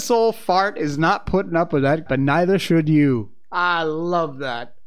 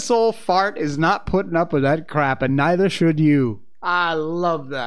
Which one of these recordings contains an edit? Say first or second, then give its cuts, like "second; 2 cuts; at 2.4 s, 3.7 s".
first; 1 cut; at 2.1 s